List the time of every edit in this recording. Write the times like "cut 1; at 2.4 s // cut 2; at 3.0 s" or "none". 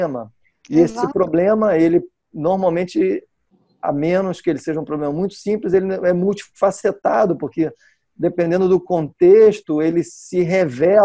none